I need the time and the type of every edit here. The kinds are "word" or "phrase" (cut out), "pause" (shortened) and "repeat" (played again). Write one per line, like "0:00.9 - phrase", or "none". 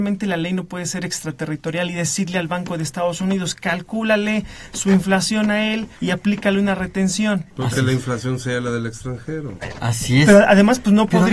0:06.0 - pause
0:07.5 - pause